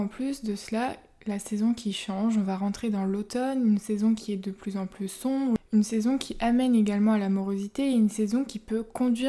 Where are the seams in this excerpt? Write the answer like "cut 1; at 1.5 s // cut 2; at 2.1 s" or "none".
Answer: none